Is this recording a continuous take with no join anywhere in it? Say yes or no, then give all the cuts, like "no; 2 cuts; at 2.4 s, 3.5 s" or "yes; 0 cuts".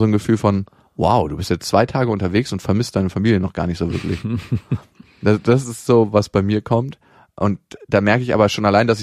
yes; 0 cuts